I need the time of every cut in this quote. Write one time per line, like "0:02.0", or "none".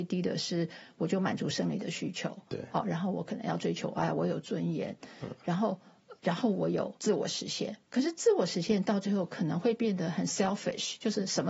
0:06.2
0:07.0
0:07.8